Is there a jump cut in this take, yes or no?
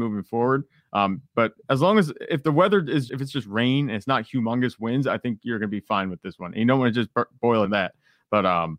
yes